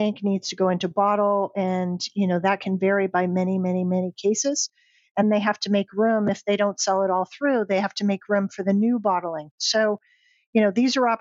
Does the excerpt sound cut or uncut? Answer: cut